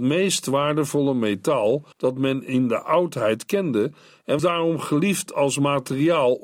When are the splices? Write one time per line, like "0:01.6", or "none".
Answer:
0:01.9
0:04.4